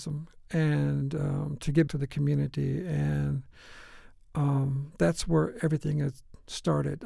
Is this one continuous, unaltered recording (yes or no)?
no